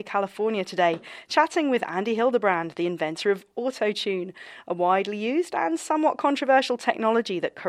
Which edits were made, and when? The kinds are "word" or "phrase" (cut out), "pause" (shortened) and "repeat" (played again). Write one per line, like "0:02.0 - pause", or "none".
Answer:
none